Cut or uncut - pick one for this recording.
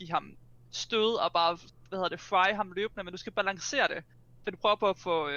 uncut